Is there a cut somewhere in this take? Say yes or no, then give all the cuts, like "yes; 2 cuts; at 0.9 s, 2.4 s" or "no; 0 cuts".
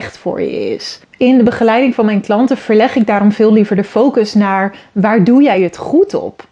no; 0 cuts